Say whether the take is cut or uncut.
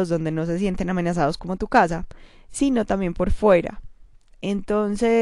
uncut